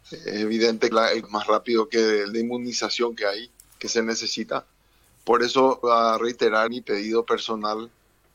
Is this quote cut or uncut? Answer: cut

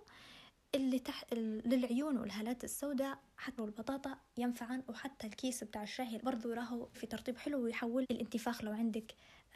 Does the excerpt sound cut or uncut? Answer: cut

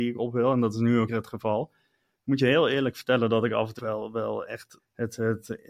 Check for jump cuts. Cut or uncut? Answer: cut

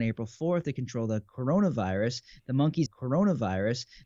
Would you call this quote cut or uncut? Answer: cut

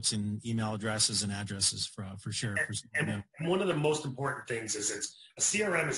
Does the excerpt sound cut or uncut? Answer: uncut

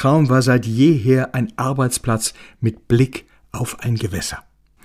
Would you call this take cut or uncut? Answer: uncut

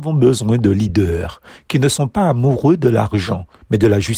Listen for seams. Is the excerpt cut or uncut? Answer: uncut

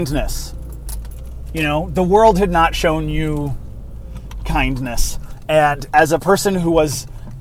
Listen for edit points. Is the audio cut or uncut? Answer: uncut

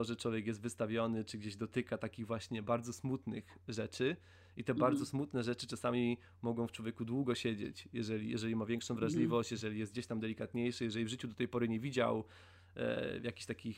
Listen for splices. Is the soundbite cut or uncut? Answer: uncut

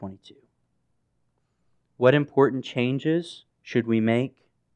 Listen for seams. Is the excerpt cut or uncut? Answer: cut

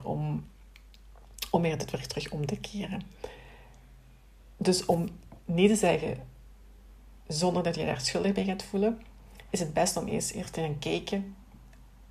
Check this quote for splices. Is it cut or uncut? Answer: uncut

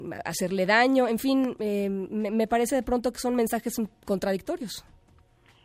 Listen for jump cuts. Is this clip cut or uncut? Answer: uncut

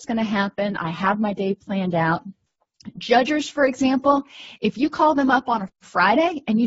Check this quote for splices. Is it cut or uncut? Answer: uncut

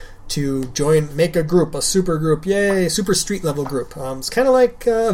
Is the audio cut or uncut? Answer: uncut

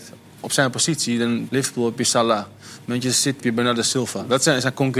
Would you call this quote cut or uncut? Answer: cut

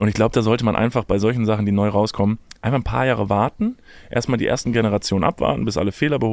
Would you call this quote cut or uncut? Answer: uncut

